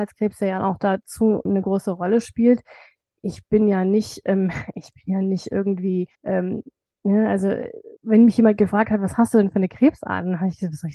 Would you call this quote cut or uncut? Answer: cut